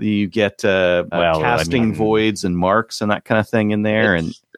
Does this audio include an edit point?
yes; 1 cut; at 1.1 s

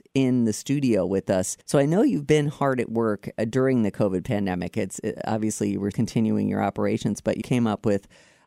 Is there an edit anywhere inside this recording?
yes; 3 cuts; at 1.6 s, 5.9 s, 7.4 s

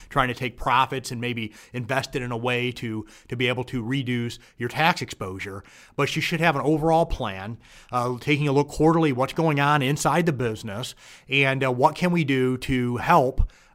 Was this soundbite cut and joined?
no; 0 cuts

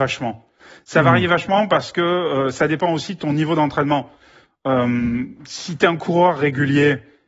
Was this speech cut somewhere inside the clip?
no; 0 cuts

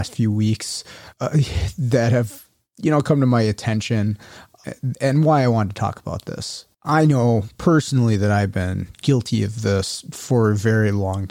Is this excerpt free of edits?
no; 2 cuts; at 1.1 s, 6.7 s

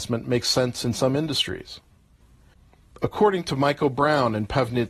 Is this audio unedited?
yes; 0 cuts

